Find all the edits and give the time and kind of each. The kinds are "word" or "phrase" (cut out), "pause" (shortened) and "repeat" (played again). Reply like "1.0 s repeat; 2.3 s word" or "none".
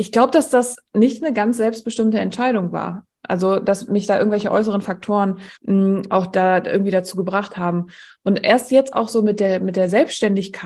5.6 s pause

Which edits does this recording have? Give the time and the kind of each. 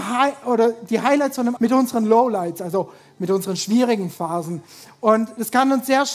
1.6 s word

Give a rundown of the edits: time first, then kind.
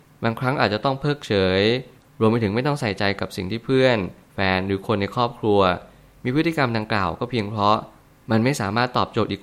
none

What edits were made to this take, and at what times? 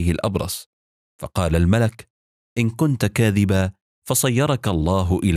none

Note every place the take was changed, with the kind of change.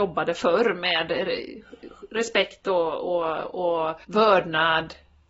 4.0 s pause

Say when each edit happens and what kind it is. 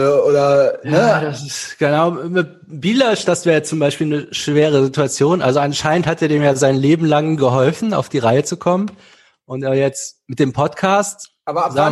none

